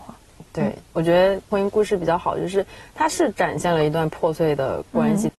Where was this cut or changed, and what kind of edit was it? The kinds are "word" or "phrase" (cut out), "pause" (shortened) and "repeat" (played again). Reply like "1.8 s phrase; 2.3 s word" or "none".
none